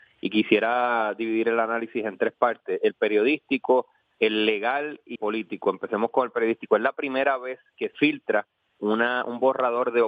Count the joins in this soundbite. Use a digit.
2